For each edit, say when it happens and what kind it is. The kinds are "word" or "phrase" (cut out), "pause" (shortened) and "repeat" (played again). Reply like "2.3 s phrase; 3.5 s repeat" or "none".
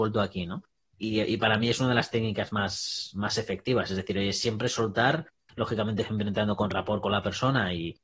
none